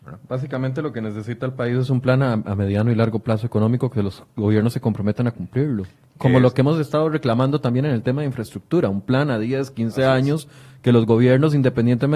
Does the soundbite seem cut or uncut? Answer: uncut